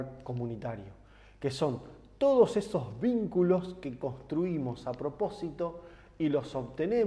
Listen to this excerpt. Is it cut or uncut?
uncut